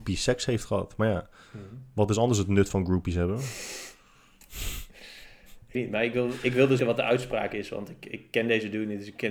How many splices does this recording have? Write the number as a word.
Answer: two